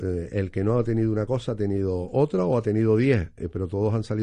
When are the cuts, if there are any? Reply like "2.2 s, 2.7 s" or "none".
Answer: none